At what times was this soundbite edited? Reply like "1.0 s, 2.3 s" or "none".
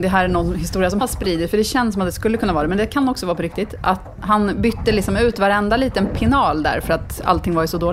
1.0 s, 4.1 s